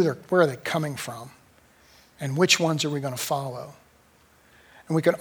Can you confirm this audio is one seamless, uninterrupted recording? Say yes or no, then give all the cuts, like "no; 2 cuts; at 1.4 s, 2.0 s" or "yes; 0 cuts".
yes; 0 cuts